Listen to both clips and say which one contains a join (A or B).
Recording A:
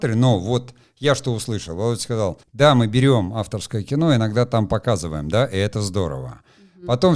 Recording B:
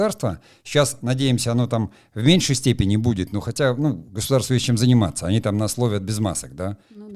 A